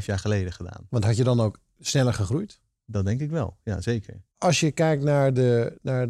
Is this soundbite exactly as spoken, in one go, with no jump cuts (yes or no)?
yes